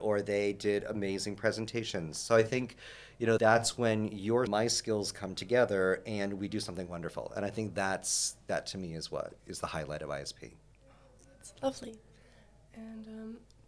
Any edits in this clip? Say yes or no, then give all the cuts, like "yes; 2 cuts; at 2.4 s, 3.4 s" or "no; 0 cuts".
yes; 3 cuts; at 3.4 s, 4.5 s, 9.4 s